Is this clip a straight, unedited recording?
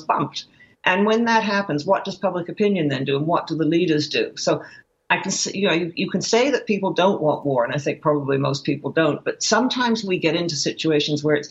yes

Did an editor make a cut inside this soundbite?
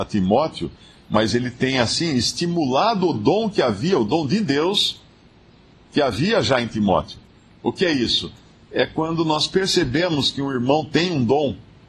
no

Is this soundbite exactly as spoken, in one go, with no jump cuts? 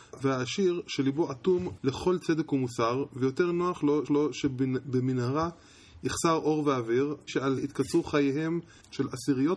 no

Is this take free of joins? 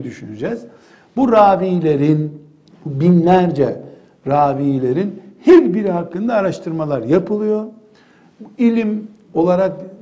yes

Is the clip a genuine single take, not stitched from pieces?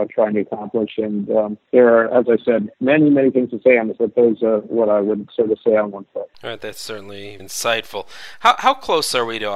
no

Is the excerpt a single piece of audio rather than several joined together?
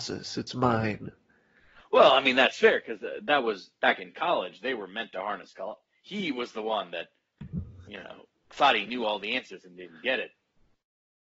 yes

